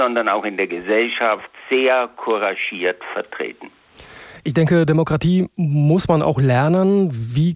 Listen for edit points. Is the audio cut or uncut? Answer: uncut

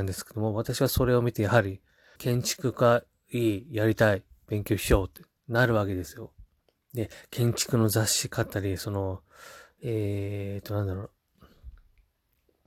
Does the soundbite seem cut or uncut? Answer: cut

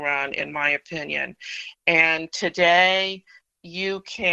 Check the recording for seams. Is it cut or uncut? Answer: uncut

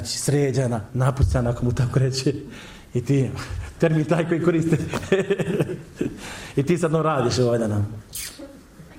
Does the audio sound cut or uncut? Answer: uncut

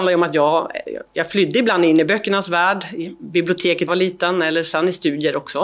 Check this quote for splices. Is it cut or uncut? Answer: cut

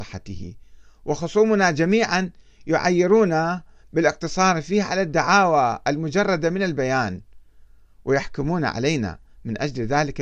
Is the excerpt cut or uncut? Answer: uncut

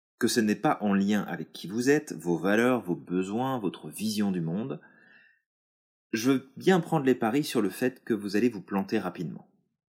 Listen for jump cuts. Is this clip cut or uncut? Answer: uncut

